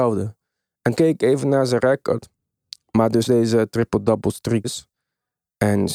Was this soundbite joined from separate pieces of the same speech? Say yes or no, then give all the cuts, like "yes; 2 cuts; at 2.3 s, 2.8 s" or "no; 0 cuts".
yes; 3 cuts; at 1.0 s, 3.3 s, 4.6 s